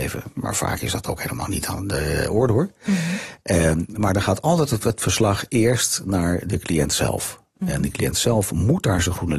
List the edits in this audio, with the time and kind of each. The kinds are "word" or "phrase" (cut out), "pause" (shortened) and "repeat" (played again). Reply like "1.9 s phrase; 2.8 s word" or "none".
none